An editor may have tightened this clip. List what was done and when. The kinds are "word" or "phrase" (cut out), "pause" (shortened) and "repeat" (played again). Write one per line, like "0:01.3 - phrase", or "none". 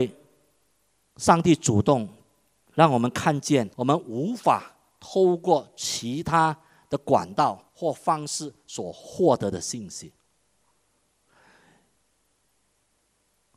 0:03.7 - pause
0:07.7 - pause